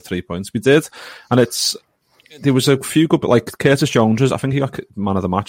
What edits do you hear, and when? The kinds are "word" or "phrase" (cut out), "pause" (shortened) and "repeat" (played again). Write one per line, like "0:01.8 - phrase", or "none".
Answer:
none